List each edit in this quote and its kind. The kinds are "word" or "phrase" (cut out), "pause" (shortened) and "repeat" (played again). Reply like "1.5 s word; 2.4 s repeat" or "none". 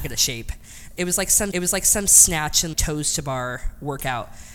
1.5 s repeat; 2.7 s word